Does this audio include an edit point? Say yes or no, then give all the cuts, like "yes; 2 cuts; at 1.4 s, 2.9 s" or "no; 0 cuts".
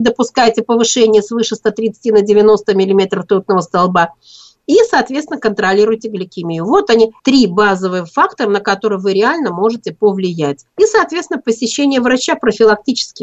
yes; 2 cuts; at 7.2 s, 10.7 s